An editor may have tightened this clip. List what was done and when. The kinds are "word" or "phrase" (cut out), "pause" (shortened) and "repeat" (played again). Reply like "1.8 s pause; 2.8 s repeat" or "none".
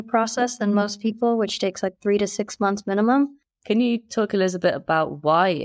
none